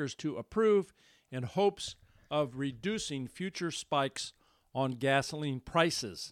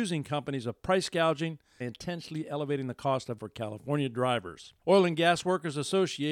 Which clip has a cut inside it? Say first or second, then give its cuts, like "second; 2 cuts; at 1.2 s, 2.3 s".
second; 3 cuts; at 1.8 s, 3.4 s, 4.8 s